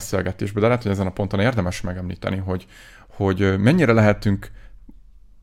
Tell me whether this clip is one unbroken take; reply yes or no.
yes